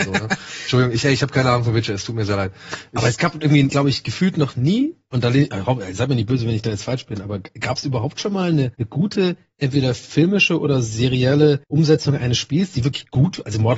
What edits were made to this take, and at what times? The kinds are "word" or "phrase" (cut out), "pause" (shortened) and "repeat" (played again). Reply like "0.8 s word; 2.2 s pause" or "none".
8.7 s pause; 11.6 s pause